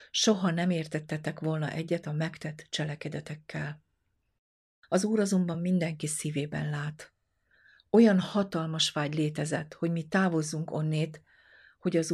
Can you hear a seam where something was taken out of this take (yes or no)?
no